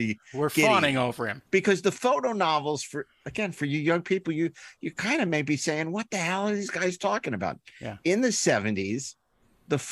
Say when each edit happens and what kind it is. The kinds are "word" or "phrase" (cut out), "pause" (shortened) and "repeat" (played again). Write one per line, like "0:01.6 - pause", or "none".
0:01.5 - pause